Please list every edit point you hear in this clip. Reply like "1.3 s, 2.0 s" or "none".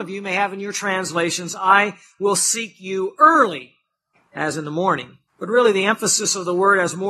4.1 s, 5.3 s